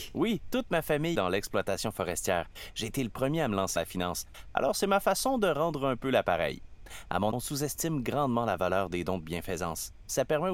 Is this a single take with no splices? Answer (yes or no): no